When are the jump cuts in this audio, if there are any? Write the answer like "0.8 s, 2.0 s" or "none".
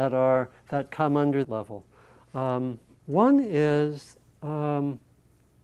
1.4 s, 2.9 s